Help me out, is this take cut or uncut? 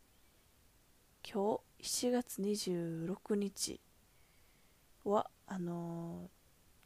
cut